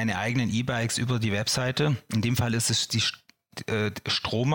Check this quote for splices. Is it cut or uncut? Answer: uncut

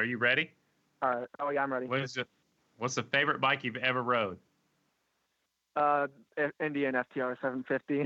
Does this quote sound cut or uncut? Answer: cut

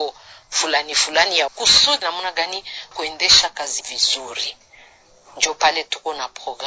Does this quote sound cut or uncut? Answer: cut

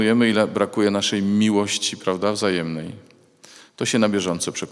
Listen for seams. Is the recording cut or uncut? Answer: uncut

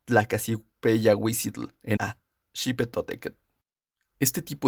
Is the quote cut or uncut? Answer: cut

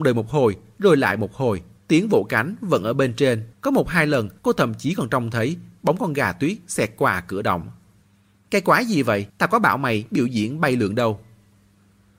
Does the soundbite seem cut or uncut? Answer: cut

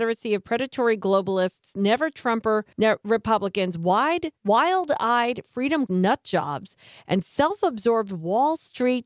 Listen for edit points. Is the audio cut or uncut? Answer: cut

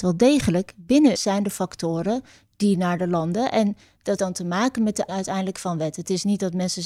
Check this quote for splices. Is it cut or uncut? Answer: cut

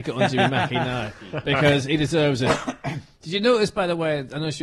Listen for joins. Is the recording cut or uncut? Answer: uncut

